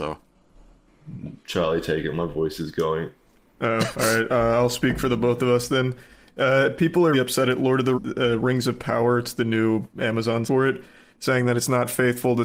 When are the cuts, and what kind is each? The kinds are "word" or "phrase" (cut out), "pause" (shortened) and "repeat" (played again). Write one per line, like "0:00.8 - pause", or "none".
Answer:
0:07.1 - word
0:07.9 - word
0:10.5 - word